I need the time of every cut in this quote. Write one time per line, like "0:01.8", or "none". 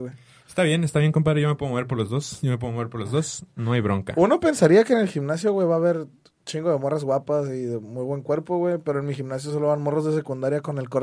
none